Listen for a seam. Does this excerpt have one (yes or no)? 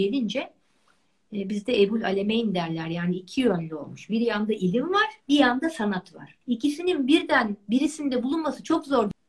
yes